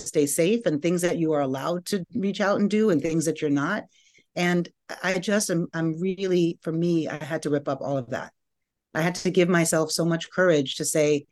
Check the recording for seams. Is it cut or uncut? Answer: uncut